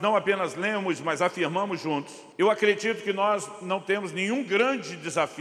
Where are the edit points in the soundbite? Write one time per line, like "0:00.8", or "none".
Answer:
0:02.3